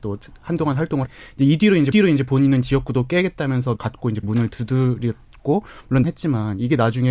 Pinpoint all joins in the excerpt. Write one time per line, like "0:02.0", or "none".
0:01.1
0:01.9
0:03.8
0:04.2
0:06.0